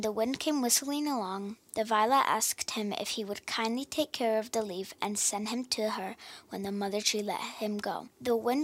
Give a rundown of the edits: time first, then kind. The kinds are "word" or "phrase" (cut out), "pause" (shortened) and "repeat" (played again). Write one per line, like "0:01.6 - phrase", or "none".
none